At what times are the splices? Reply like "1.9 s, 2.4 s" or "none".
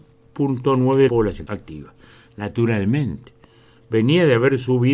1.1 s